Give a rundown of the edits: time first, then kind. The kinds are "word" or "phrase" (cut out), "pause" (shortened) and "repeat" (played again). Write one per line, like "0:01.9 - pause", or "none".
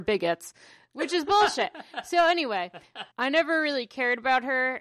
0:03.1 - pause